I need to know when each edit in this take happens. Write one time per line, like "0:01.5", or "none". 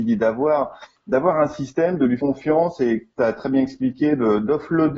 0:02.2
0:03.2